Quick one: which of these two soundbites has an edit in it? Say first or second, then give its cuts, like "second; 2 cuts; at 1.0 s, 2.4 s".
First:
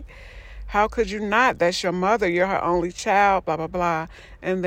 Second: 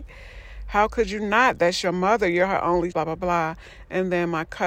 second; 1 cut; at 2.9 s